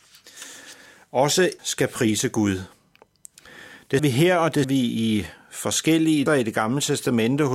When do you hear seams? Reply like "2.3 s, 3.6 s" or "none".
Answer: 1.6 s, 4.0 s, 4.6 s, 6.3 s